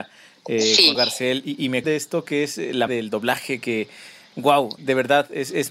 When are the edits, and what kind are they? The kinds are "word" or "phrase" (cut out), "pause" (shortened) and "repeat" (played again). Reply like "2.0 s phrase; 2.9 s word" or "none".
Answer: 0.9 s word; 1.8 s word; 2.9 s word; 4.8 s word